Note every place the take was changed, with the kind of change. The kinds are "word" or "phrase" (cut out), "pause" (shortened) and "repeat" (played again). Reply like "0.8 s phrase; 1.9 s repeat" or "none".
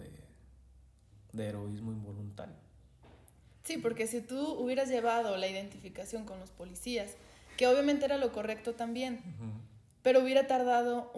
none